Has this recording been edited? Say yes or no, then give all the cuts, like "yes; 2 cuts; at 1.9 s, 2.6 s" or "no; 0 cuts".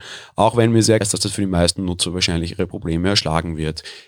yes; 1 cut; at 1.0 s